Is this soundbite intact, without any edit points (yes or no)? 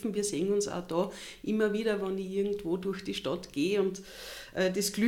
yes